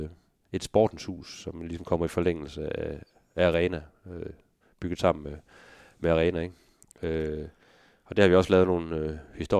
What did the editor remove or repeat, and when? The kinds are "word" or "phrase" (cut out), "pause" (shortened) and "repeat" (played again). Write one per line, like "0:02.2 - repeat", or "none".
none